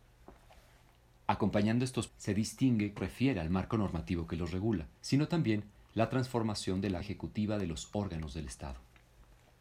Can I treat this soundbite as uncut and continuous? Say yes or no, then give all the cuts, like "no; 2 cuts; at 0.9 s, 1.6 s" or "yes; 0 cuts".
no; 4 cuts; at 2.1 s, 3.0 s, 5.0 s, 7.0 s